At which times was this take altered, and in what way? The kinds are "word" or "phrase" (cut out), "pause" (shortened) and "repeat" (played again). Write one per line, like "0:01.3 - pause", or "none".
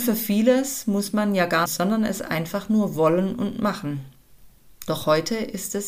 0:01.7 - phrase
0:04.6 - pause